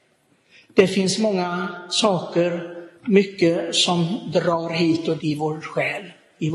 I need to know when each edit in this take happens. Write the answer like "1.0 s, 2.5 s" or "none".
3.0 s, 5.2 s